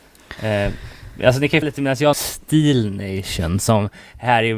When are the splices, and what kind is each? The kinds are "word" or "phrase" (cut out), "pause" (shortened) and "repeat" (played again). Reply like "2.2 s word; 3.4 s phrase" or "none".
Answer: 1.6 s word; 2.1 s phrase